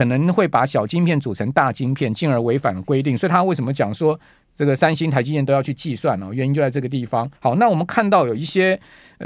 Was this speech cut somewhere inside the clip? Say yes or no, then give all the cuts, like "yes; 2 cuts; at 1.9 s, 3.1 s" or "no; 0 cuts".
yes; 1 cut; at 7.4 s